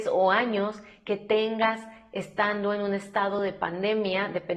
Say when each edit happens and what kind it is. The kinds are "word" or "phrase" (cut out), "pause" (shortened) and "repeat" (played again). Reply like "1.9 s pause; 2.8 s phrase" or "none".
none